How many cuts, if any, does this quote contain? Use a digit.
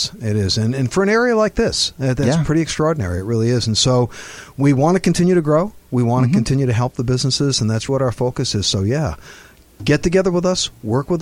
1